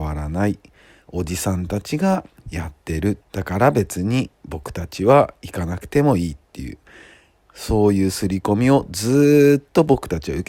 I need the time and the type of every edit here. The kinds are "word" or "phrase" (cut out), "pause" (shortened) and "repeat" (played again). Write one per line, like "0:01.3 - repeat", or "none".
0:03.2 - pause